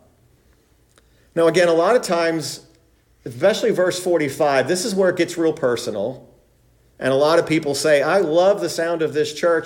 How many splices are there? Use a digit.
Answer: 0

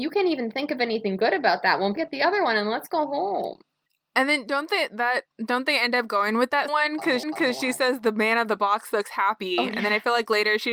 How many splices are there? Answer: 5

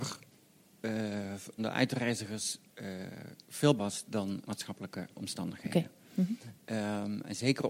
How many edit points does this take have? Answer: 5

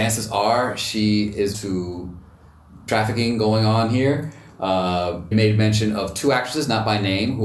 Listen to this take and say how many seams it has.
3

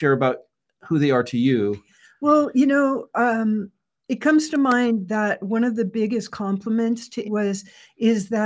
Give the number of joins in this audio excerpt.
1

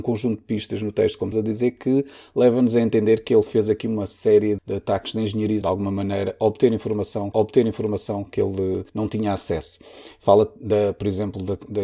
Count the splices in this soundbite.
5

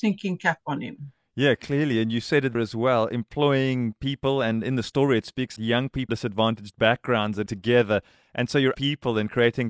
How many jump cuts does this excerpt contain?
5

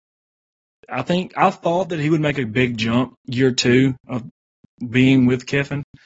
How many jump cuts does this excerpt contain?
1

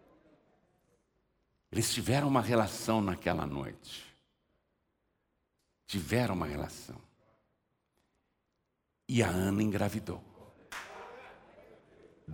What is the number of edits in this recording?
0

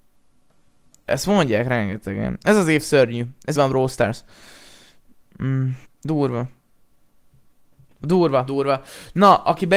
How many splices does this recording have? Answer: 3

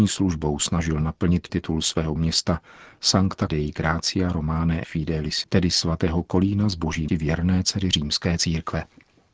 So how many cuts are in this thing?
6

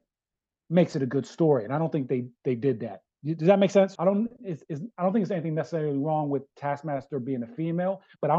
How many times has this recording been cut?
1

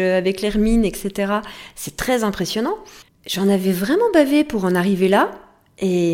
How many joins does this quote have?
1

